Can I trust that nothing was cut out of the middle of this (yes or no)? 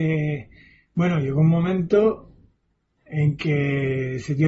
yes